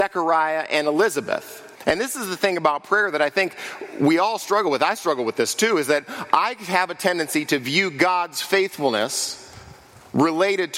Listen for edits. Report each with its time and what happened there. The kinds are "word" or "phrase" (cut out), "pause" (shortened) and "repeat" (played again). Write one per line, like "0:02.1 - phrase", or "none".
0:01.8 - pause